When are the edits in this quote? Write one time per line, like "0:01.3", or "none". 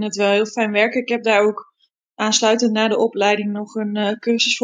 none